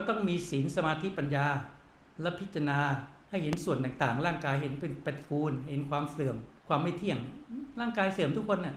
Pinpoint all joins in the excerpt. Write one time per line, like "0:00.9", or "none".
0:03.2
0:06.6